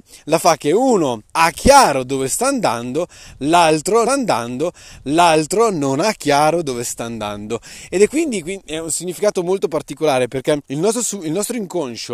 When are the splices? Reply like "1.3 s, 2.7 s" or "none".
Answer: 1.3 s, 4.1 s, 10.6 s